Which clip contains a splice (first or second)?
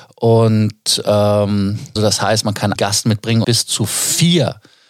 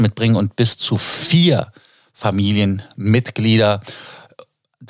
first